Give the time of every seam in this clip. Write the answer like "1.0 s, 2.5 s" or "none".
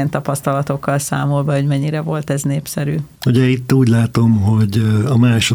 3.2 s

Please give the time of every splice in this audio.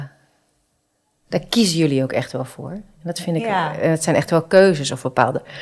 none

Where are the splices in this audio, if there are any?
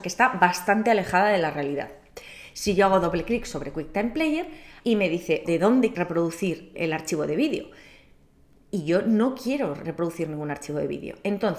4.8 s, 5.4 s, 5.9 s, 6.7 s

